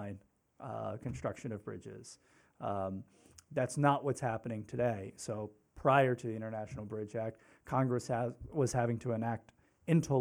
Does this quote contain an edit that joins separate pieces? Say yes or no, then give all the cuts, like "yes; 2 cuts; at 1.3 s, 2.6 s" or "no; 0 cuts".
no; 0 cuts